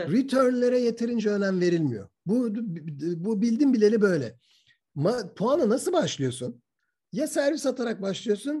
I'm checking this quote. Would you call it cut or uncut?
uncut